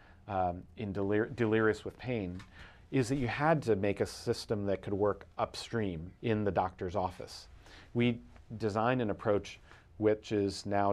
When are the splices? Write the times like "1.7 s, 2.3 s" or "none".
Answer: 6.2 s